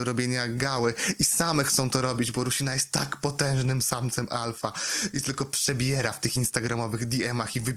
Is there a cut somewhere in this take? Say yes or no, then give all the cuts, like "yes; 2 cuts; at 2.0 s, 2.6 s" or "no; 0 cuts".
no; 0 cuts